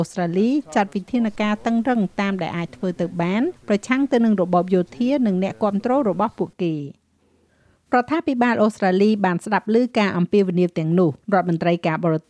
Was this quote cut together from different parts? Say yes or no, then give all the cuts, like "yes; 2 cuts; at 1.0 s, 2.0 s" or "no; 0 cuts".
yes; 2 cuts; at 3.6 s, 11.2 s